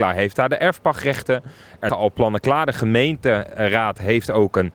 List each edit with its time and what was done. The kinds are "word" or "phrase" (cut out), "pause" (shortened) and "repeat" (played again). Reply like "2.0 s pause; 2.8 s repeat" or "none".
1.9 s word

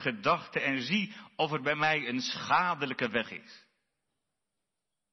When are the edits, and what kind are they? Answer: none

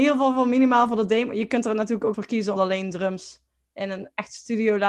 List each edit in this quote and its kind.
2.1 s word; 2.6 s word

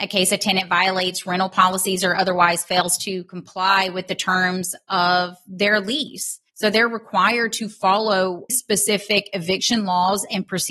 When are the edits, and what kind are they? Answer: 6.5 s pause; 8.5 s word

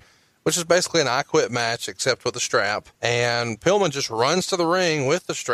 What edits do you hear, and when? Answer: 2.9 s pause

